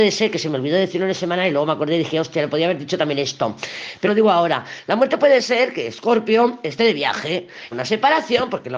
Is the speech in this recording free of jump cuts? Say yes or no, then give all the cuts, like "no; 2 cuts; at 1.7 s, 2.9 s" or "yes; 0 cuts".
no; 2 cuts; at 4.1 s, 7.7 s